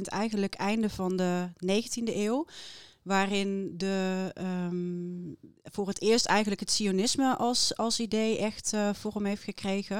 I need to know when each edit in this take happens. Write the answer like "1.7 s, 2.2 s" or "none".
5.6 s